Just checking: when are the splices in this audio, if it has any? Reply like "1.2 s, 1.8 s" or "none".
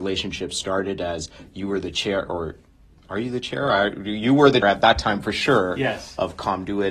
4.6 s